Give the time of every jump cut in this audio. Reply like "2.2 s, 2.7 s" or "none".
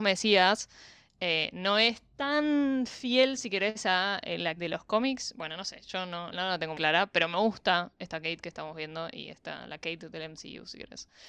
2.1 s, 4.6 s, 6.3 s, 6.7 s

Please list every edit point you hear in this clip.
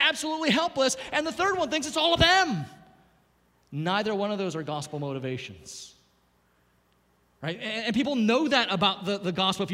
2.2 s

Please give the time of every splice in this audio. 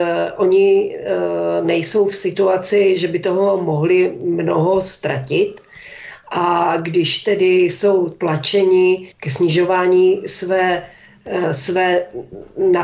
9.1 s

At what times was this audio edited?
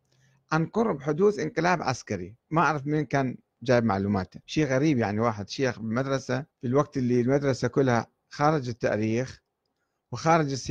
2.4 s, 4.4 s, 6.5 s

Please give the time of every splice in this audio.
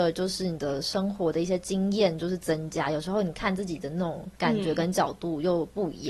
4.4 s

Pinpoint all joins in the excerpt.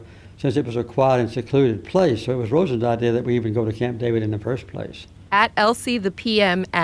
none

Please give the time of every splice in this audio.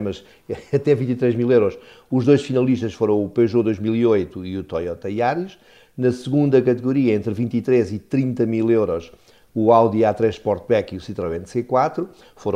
none

